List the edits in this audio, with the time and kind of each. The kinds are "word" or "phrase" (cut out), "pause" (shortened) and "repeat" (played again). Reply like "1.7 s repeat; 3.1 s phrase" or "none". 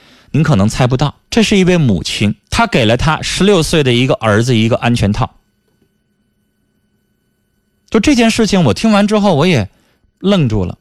1.3 s pause; 2.4 s pause

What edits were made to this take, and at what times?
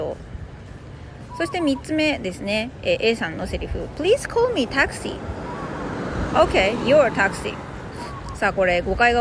none

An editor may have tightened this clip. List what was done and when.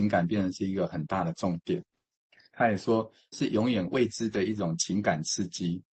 3.3 s word

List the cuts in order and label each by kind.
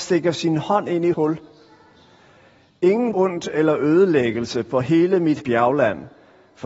1.1 s word; 3.1 s word; 5.4 s word

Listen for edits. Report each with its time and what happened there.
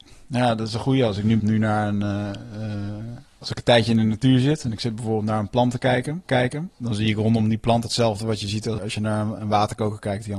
1.4 s word; 3.3 s pause; 6.3 s repeat; 8.8 s word; 9.4 s word

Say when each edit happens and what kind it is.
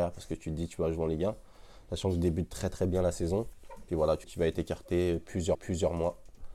4.2 s word; 5.5 s repeat

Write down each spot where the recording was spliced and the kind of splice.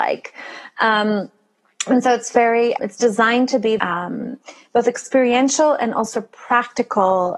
2.8 s word; 3.8 s word

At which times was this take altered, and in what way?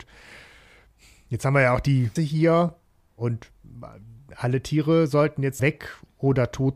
2.2 s word; 5.6 s word

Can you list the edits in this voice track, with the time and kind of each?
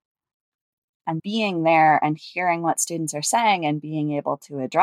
1.2 s word

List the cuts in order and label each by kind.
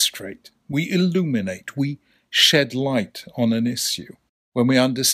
none

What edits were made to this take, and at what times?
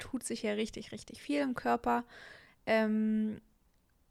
none

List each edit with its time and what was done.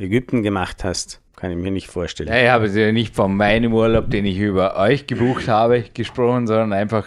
1.3 s pause

